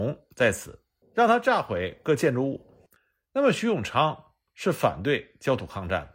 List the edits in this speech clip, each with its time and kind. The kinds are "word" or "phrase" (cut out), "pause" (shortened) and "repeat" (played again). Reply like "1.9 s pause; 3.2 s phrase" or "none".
3.0 s pause